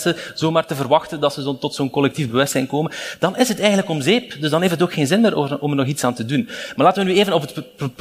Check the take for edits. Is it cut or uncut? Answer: uncut